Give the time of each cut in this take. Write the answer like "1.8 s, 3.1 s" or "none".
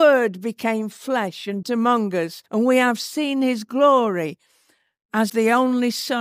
1.6 s, 2.5 s, 5.3 s